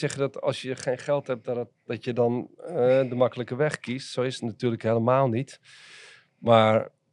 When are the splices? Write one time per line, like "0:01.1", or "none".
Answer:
none